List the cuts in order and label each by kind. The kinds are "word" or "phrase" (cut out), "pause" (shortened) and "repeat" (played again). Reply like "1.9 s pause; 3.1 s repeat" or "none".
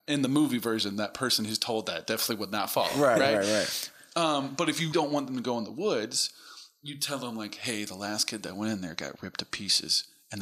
4.9 s word